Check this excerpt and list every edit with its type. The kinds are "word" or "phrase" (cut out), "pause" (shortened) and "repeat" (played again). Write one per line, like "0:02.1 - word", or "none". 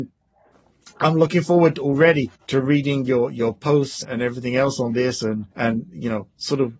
0:02.3 - pause
0:04.0 - word
0:05.5 - pause